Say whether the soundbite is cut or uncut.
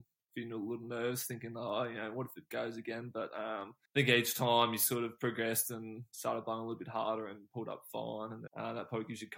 cut